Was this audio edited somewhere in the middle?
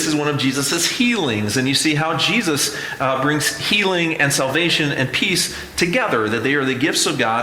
no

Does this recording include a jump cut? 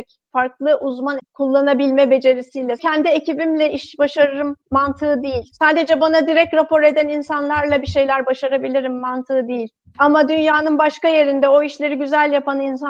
yes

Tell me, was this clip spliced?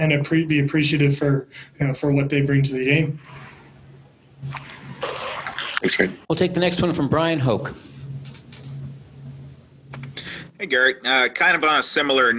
yes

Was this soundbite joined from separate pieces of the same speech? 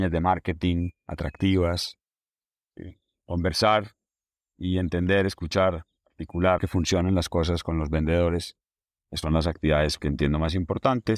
yes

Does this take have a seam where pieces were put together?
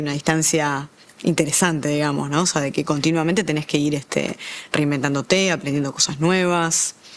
no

